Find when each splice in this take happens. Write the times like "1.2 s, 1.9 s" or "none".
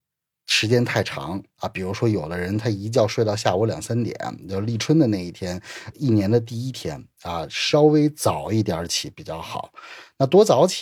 5.9 s

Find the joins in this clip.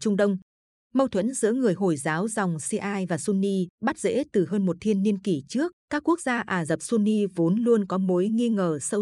3.7 s, 5.8 s

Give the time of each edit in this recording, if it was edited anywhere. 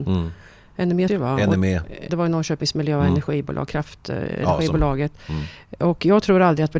1.1 s, 2.1 s

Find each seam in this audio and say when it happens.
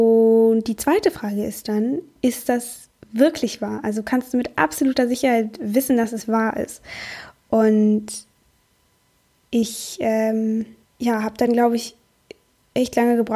none

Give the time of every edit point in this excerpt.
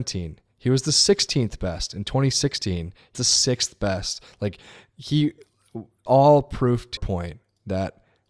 3.1 s, 6.1 s, 7.0 s

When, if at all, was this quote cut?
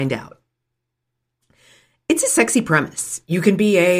none

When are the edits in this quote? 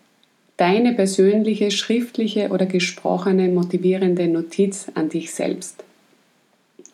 none

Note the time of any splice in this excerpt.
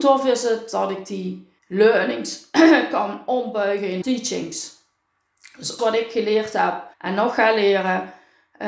1.6 s, 4.0 s, 5.8 s, 6.9 s

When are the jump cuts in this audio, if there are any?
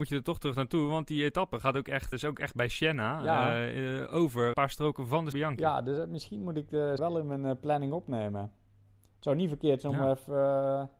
2.1 s, 4.5 s, 5.3 s, 7.0 s

